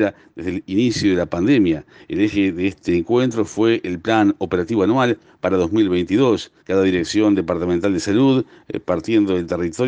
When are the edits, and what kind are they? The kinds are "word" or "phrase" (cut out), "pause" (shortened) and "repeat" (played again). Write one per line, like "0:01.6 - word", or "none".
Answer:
0:06.6 - pause